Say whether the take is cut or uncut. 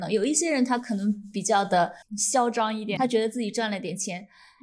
cut